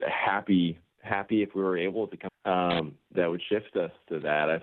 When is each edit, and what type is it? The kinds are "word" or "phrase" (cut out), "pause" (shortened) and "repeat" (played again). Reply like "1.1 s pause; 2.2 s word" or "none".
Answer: 2.3 s phrase